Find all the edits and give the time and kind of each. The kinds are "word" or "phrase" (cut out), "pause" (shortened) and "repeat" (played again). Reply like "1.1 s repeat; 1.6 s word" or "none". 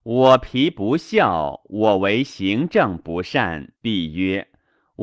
3.8 s pause